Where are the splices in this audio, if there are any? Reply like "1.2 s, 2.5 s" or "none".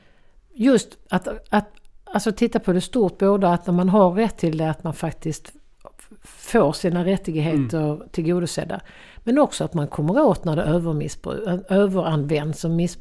none